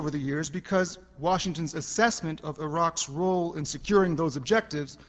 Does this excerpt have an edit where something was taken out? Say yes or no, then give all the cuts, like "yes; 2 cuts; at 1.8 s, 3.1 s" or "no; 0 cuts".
no; 0 cuts